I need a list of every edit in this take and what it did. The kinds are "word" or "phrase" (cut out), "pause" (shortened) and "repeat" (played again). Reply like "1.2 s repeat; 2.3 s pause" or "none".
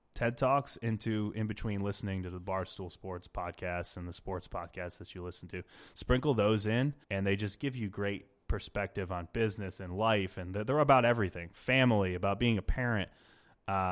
7.0 s pause